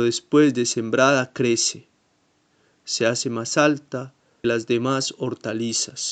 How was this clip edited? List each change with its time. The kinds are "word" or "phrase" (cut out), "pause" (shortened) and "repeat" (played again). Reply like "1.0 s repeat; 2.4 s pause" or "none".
4.4 s word